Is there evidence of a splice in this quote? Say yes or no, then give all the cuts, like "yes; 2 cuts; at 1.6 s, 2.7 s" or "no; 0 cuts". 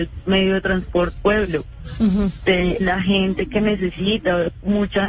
yes; 2 cuts; at 1.1 s, 2.8 s